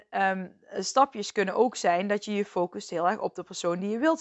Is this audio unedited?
yes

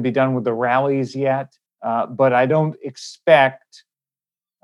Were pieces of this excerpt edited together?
yes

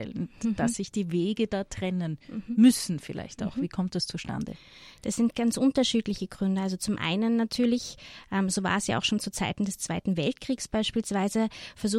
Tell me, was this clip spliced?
no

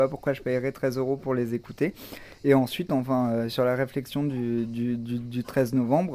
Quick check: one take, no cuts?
yes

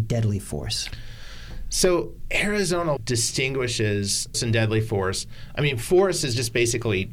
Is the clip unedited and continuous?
no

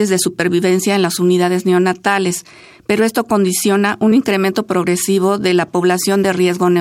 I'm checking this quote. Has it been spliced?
no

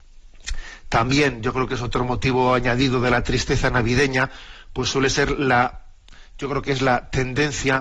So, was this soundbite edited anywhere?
no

